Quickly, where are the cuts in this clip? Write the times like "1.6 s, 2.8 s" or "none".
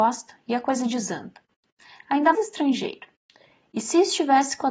2.3 s

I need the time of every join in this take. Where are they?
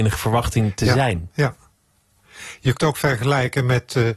2.7 s

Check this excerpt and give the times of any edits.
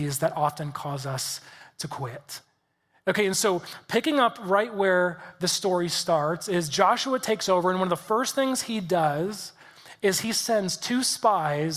none

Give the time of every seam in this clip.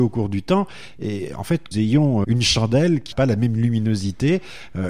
1.7 s, 2.2 s, 3.1 s

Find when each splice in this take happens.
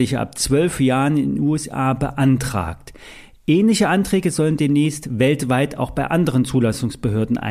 none

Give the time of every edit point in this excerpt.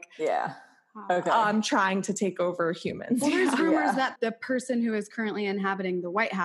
4.2 s

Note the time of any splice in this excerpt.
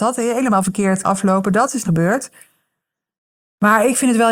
1.0 s, 1.8 s

